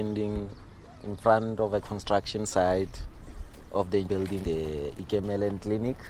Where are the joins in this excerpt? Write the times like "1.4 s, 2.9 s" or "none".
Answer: 4.0 s, 4.4 s